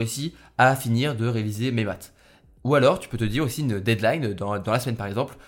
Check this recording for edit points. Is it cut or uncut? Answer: uncut